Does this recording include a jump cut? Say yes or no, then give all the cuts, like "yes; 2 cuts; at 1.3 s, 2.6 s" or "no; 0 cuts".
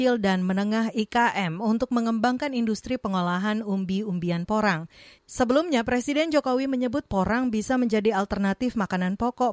no; 0 cuts